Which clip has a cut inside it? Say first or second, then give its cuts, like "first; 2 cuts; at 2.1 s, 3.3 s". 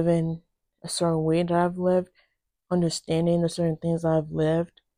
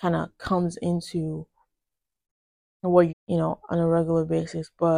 second; 1 cut; at 3.1 s